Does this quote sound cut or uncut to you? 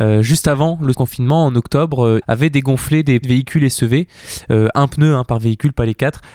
cut